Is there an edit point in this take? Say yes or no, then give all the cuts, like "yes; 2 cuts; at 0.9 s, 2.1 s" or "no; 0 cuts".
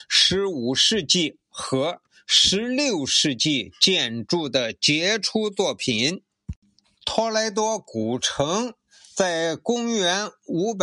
no; 0 cuts